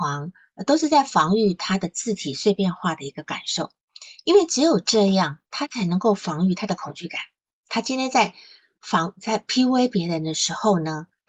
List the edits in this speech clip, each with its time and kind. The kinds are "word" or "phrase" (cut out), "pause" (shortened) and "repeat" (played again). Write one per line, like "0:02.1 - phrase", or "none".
none